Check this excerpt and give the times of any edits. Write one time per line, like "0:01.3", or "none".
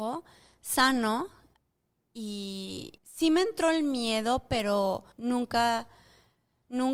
0:03.0
0:05.1